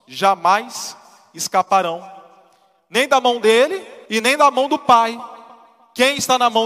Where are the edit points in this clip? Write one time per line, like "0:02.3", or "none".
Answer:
0:04.1